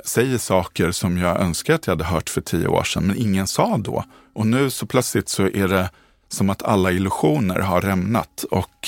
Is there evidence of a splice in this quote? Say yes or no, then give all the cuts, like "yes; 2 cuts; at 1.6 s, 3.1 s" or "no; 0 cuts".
no; 0 cuts